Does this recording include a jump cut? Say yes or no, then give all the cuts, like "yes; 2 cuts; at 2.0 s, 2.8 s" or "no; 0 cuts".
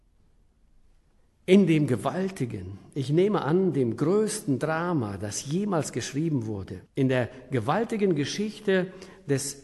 yes; 1 cut; at 6.9 s